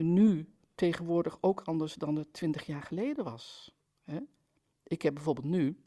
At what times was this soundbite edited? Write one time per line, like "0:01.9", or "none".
none